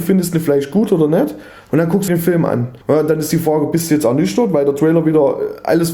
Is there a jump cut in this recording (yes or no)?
yes